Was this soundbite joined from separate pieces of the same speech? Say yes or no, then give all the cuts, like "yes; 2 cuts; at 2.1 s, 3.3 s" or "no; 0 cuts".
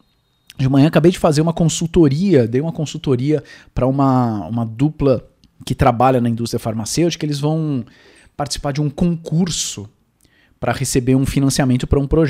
no; 0 cuts